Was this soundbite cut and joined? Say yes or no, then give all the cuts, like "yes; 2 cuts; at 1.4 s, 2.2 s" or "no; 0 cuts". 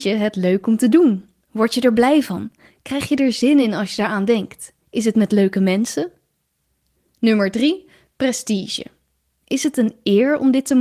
no; 0 cuts